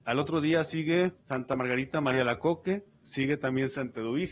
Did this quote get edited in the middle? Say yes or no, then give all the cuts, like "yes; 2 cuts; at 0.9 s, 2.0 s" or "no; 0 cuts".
yes; 1 cut; at 1.2 s